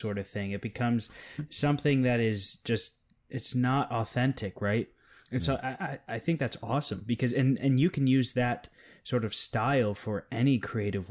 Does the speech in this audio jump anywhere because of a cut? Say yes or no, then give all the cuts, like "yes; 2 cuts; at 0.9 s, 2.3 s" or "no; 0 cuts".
no; 0 cuts